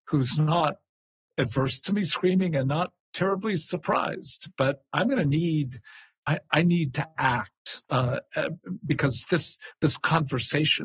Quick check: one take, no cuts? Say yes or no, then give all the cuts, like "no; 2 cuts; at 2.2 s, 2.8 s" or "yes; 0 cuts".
no; 2 cuts; at 6.2 s, 7.8 s